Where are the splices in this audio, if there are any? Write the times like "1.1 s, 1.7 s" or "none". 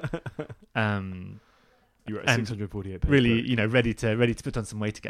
2.1 s